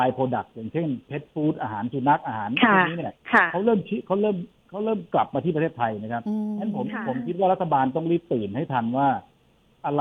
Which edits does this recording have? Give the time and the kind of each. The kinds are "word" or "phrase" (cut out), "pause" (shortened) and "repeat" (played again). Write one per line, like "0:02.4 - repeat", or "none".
none